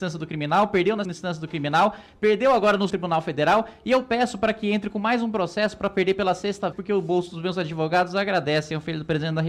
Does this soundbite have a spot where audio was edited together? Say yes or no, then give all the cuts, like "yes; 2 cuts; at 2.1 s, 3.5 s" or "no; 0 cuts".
yes; 3 cuts; at 1.0 s, 2.9 s, 6.7 s